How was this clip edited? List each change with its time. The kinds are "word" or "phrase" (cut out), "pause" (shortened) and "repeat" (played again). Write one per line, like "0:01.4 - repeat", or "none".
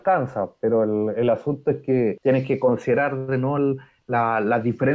none